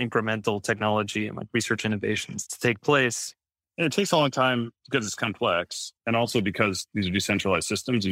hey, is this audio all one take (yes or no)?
no